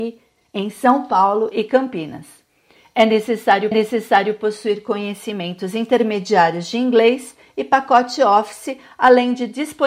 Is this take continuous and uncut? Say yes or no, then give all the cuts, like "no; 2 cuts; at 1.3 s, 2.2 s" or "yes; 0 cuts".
no; 1 cut; at 3.7 s